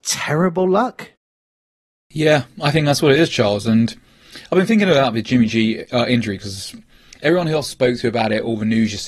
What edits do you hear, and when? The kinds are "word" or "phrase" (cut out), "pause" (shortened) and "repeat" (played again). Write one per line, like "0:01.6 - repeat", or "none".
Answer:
none